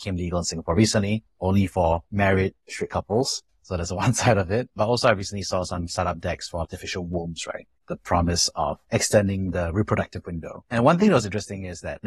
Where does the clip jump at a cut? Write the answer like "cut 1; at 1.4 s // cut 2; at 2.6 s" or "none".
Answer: cut 1; at 7.8 s